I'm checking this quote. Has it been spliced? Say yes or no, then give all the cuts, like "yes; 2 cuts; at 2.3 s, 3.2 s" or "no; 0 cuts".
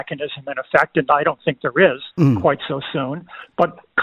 yes; 1 cut; at 2.1 s